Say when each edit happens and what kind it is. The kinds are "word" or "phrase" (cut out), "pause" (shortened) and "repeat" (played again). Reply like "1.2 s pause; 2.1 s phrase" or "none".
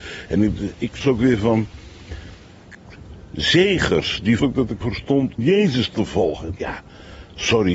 1.0 s word; 4.4 s word; 4.8 s word; 5.4 s word; 6.6 s word